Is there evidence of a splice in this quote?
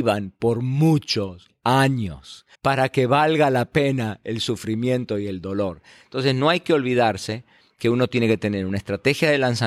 yes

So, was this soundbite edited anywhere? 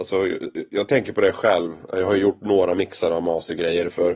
no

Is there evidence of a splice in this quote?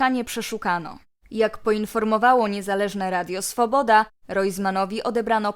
no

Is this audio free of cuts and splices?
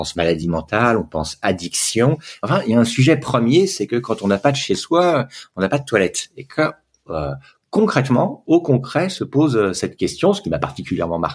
yes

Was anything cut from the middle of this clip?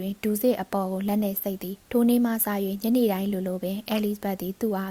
yes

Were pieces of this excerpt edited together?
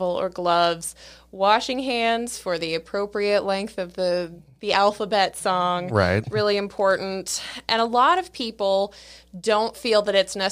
no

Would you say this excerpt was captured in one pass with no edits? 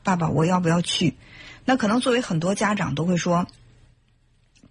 yes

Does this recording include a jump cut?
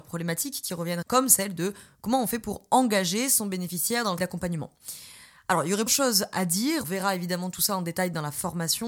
yes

